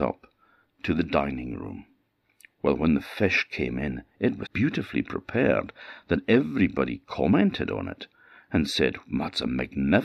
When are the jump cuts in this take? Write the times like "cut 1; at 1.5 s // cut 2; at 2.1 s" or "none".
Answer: cut 1; at 4.5 s